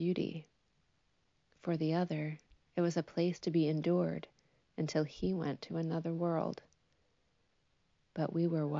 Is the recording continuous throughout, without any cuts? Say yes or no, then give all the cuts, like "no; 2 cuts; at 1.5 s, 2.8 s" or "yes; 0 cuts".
yes; 0 cuts